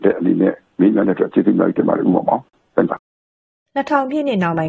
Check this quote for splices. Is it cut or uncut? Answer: cut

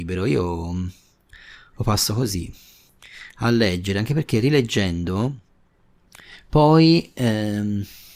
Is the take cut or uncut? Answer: uncut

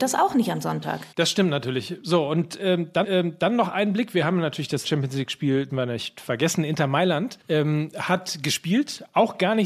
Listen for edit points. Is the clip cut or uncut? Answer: cut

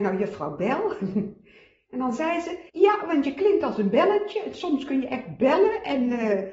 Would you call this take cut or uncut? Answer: cut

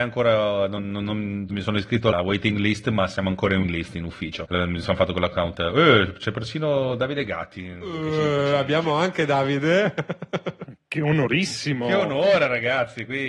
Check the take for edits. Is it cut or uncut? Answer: cut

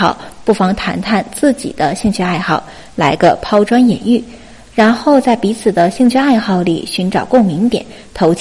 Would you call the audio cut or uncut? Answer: uncut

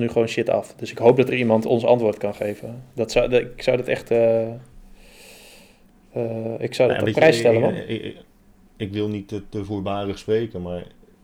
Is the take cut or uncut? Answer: uncut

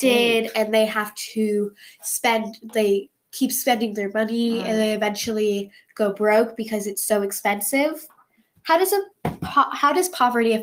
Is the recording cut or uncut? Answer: uncut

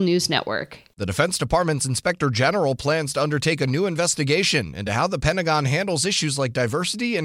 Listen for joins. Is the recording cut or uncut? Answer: uncut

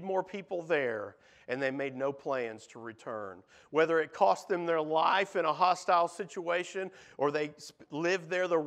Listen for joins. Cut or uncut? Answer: uncut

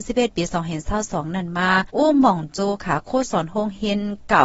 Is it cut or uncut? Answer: cut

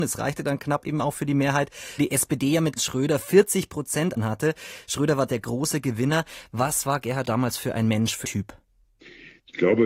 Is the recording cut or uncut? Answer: cut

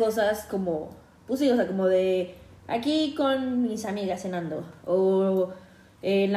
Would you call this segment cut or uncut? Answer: uncut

